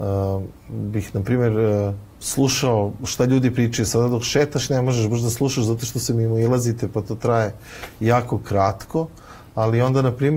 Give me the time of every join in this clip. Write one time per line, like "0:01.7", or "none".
0:02.1